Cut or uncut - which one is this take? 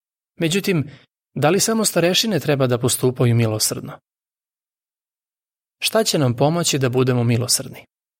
uncut